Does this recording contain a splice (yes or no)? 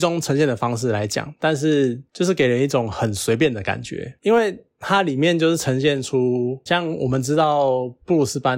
yes